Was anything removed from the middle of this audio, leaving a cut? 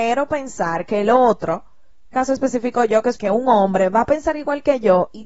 yes; 2 cuts; at 2.1 s, 3.2 s

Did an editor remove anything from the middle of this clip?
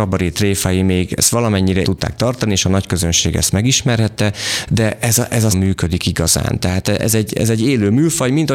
yes; 2 cuts; at 1.8 s, 5.5 s

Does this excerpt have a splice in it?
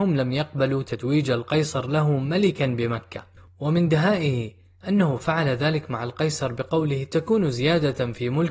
no; 0 cuts

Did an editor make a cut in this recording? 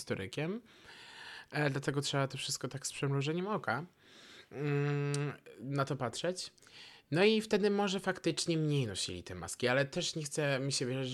no; 0 cuts

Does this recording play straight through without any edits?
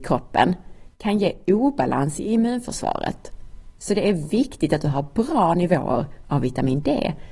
yes; 0 cuts

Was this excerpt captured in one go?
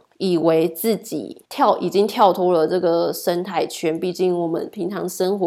no; 1 cut; at 1.4 s

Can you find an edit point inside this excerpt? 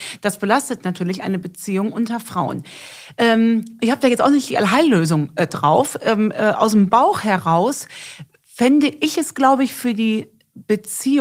no; 0 cuts

